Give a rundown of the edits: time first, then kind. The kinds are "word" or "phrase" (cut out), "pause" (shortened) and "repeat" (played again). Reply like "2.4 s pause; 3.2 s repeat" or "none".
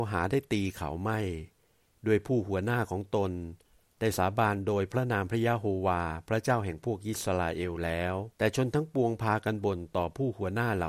8.3 s pause